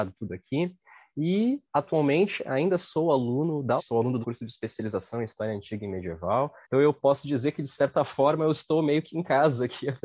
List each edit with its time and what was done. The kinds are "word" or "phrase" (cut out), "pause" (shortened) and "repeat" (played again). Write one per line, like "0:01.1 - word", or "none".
0:03.8 - phrase
0:04.2 - word
0:06.6 - pause